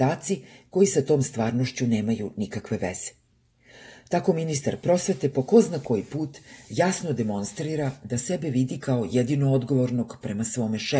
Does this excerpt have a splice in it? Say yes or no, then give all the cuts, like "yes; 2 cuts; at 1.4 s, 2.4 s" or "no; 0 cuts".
no; 0 cuts